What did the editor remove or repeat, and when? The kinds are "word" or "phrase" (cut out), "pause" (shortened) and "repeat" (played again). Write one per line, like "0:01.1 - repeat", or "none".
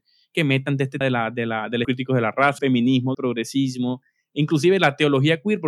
0:01.0 - word
0:01.8 - word
0:02.6 - word
0:03.1 - word